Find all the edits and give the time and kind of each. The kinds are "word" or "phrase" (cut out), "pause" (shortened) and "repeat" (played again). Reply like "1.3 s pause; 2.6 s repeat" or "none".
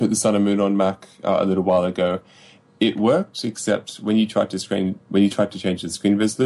none